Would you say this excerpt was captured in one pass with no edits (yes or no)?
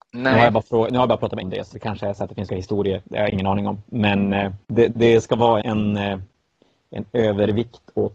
no